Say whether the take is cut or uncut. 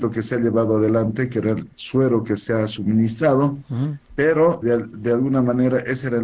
cut